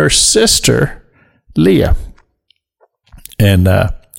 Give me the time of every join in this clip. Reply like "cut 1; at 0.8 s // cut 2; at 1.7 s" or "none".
none